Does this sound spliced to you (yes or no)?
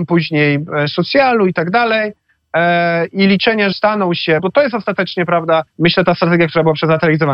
yes